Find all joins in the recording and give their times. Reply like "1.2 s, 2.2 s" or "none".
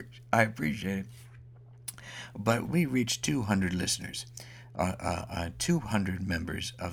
2.6 s

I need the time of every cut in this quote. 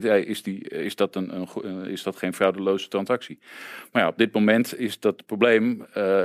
none

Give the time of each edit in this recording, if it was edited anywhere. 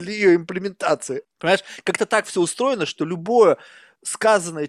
none

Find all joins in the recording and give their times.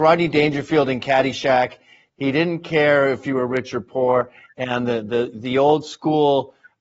none

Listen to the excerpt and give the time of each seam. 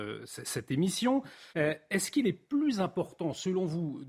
1.5 s

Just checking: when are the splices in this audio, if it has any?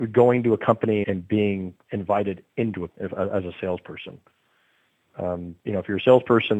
1.0 s, 2.9 s, 5.6 s

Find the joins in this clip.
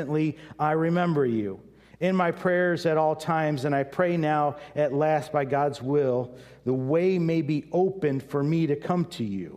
none

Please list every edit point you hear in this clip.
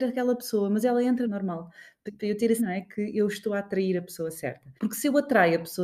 1.2 s, 2.1 s, 2.6 s, 4.8 s

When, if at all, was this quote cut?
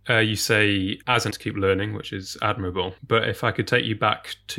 1.3 s, 3.0 s

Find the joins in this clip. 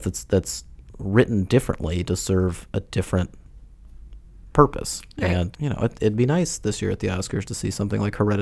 5.5 s

